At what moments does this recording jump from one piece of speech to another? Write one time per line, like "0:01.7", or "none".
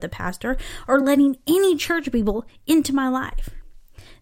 none